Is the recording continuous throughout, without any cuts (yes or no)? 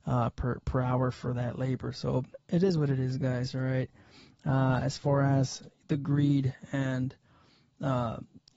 yes